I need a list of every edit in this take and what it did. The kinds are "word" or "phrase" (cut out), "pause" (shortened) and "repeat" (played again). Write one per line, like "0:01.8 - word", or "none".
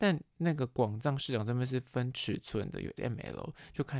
0:03.0 - word